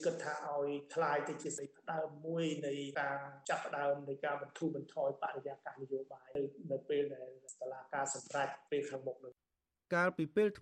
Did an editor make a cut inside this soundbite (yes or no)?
no